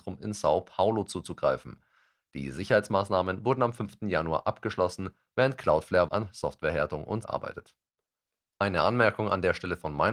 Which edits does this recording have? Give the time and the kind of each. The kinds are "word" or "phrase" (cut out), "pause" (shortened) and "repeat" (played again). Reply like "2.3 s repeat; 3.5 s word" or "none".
6.1 s word; 7.2 s word